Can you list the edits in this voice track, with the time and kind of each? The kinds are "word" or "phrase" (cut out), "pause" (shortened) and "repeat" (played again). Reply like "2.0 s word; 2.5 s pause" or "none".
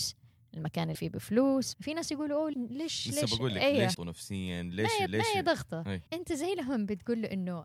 0.9 s word; 1.7 s phrase; 2.5 s word; 3.9 s word; 5.1 s repeat; 6.1 s pause